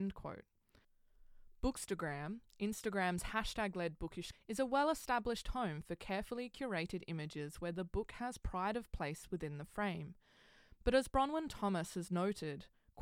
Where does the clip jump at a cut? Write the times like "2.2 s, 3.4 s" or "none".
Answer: 4.3 s